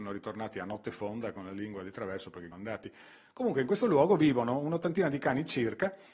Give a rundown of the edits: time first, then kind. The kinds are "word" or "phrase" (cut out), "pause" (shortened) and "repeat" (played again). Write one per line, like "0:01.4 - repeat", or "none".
0:02.5 - phrase